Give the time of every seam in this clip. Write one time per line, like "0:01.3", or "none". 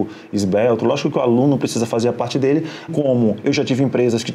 0:02.9